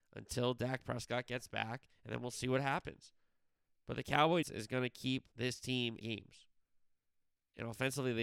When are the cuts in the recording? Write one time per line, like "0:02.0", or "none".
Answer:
0:01.9
0:04.4
0:05.3
0:06.0